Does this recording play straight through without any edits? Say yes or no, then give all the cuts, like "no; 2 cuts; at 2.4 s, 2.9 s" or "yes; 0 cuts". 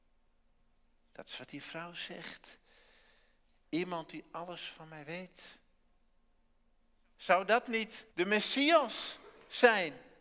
no; 1 cut; at 8.1 s